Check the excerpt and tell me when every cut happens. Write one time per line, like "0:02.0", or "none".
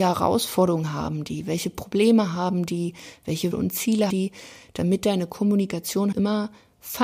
0:03.5
0:04.1
0:06.1